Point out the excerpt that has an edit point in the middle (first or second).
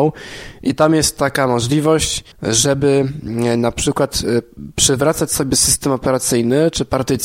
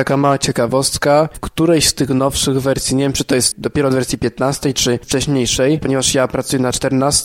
first